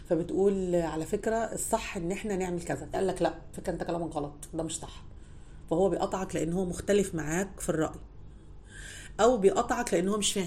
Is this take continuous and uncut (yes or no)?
no